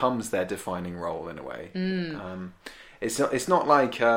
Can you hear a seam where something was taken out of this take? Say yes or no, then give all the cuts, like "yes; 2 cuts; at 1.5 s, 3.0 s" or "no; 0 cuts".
no; 0 cuts